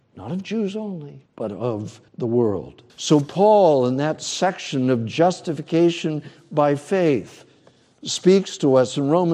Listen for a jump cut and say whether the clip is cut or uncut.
cut